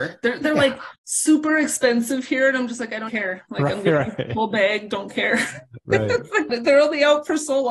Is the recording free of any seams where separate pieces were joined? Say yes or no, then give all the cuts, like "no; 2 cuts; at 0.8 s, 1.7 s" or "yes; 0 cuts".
no; 3 cuts; at 1.0 s, 3.1 s, 6.5 s